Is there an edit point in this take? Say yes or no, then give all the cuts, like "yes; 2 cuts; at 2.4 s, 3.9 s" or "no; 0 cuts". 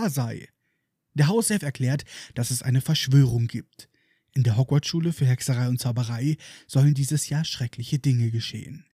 no; 0 cuts